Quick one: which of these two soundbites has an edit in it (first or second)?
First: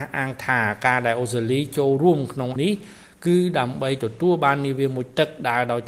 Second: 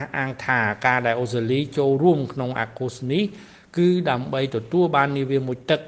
first